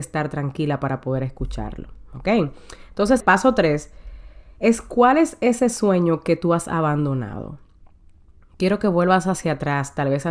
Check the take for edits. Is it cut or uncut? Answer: cut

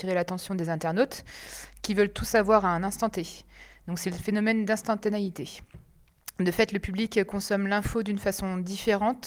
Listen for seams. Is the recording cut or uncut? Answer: uncut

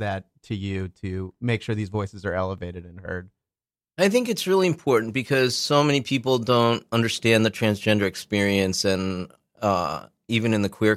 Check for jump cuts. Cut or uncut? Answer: uncut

